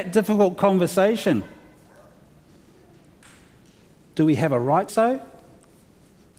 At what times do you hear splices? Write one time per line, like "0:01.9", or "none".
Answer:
0:04.9